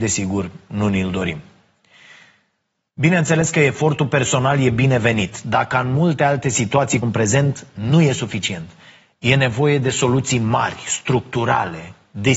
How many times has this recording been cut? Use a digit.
1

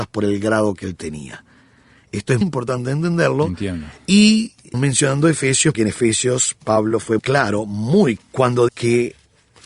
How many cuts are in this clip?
6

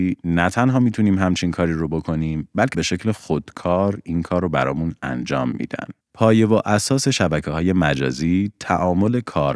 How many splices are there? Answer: 2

